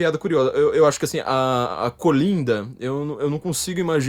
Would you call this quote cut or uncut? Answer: uncut